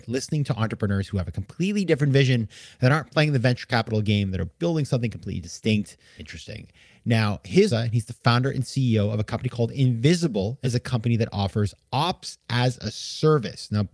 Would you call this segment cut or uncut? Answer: cut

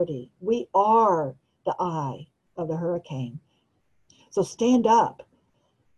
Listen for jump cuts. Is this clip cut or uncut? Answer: uncut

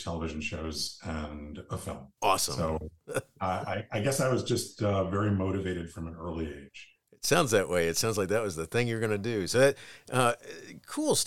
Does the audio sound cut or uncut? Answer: cut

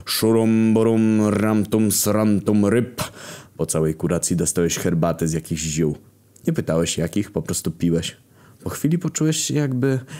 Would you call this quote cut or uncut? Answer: uncut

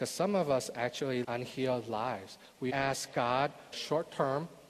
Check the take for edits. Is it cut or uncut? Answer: cut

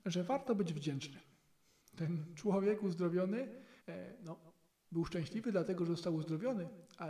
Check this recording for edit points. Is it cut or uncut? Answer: cut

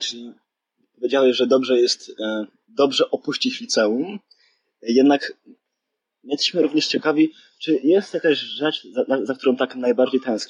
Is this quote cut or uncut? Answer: uncut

